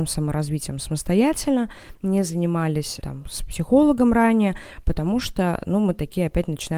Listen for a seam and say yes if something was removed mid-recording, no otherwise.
no